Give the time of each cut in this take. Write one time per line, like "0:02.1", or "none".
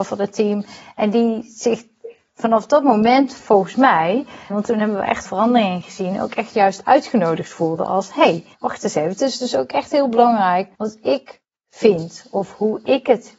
0:04.5
0:05.2
0:08.5
0:10.7